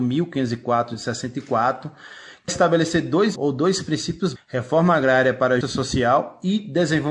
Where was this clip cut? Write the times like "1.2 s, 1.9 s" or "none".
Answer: 2.5 s, 3.4 s, 4.4 s, 5.6 s